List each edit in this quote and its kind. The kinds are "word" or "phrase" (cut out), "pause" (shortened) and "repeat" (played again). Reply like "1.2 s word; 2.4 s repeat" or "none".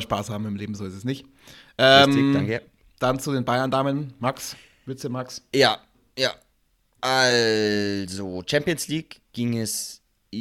none

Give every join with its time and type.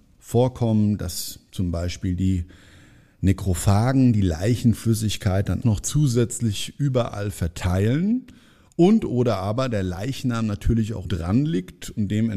5.6 s word; 11.0 s word

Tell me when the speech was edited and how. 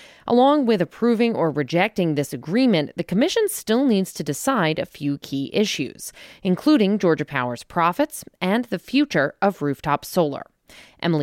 none

